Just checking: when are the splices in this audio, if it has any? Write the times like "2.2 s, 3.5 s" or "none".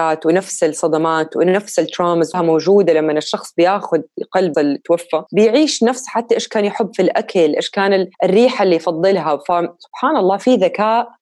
2.3 s, 4.5 s, 8.1 s